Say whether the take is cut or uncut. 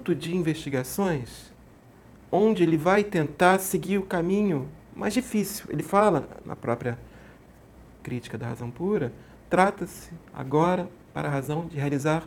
uncut